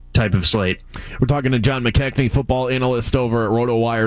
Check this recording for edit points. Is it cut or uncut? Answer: uncut